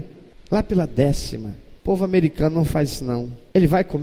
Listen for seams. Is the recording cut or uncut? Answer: uncut